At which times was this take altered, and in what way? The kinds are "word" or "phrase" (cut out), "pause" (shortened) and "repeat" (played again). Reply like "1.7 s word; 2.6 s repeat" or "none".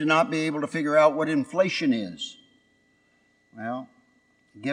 none